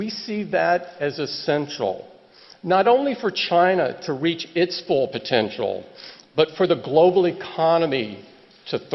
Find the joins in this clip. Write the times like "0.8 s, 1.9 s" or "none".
none